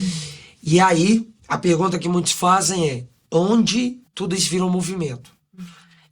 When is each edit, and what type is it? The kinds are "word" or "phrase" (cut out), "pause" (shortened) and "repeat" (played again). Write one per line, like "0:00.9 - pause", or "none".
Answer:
0:04.1 - pause